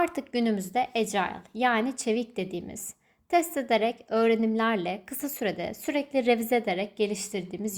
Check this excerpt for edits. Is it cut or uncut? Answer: uncut